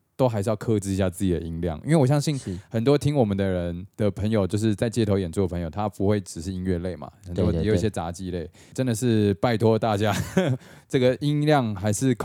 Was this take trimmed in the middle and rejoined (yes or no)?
no